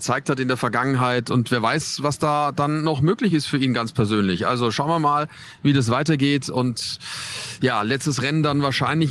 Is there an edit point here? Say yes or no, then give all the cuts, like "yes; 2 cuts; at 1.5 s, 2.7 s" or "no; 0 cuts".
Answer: no; 0 cuts